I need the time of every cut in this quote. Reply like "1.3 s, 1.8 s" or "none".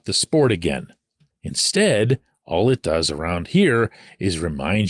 none